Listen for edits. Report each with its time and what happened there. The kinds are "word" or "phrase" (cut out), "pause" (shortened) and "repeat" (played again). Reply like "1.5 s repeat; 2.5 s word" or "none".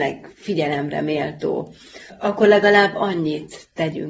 none

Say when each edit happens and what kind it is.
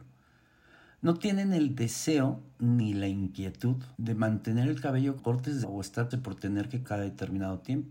3.9 s pause; 5.2 s word; 5.6 s word; 6.1 s word; 6.8 s word

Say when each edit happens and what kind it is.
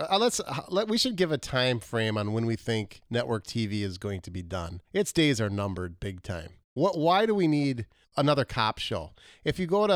3.0 s pause; 4.9 s pause; 6.6 s pause; 8.0 s pause

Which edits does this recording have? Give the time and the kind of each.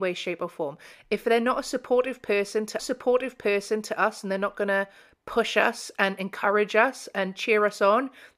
2.8 s repeat

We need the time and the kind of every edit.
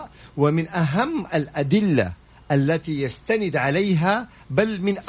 none

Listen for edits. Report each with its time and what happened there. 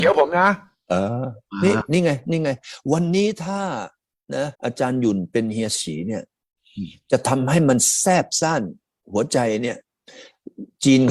4.5 s pause

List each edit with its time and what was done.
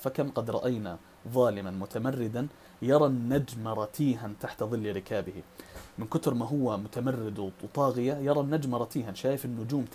none

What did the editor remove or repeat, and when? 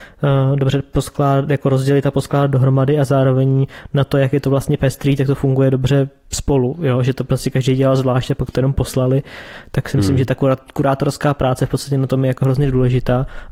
none

